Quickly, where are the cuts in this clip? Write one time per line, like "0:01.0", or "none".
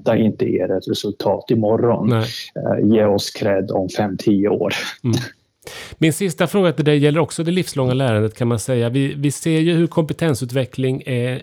none